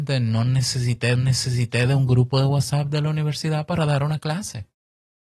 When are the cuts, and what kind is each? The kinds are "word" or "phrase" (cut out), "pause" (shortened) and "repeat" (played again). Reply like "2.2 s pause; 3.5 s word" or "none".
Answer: 1.1 s repeat